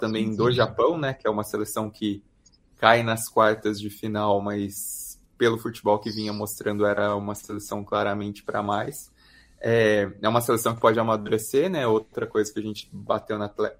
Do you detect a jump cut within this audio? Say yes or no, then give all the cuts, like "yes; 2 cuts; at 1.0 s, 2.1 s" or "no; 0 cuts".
no; 0 cuts